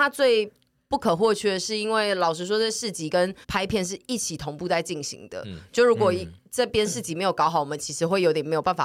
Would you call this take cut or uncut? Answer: cut